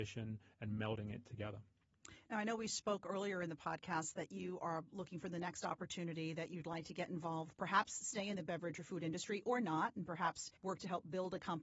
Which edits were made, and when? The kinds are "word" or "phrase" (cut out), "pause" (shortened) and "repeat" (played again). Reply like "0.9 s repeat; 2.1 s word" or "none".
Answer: 10.6 s pause

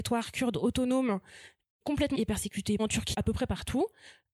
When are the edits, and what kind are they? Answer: 1.8 s word; 2.1 s word; 2.8 s word; 3.1 s word

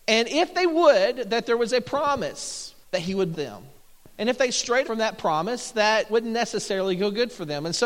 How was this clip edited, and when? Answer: 2.8 s pause; 3.3 s word; 4.8 s word; 6.1 s word

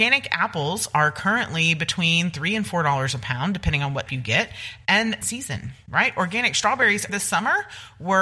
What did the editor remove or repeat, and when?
4.1 s word; 5.2 s phrase; 7.1 s word

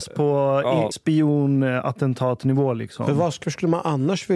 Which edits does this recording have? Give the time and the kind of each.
0.9 s word; 3.4 s word

